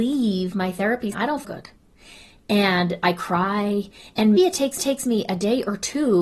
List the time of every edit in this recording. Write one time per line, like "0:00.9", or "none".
0:01.1
0:01.4
0:04.4
0:04.8